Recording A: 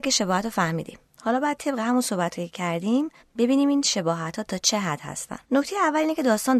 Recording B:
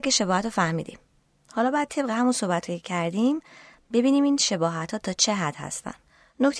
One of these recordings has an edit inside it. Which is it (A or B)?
A